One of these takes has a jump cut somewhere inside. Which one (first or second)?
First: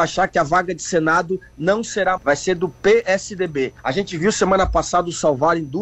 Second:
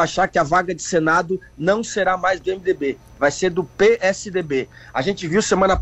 first